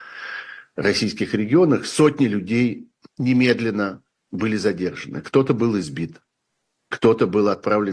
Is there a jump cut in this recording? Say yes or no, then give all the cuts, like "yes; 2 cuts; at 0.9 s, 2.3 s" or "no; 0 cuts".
no; 0 cuts